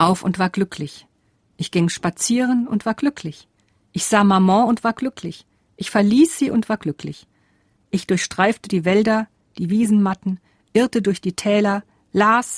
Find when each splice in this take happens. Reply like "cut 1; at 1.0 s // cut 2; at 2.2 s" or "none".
none

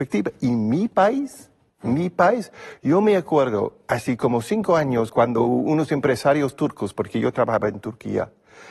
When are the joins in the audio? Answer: none

